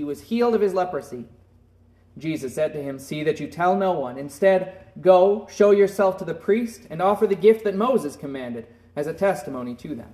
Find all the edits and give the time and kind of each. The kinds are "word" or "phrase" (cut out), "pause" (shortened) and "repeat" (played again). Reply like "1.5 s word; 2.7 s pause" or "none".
none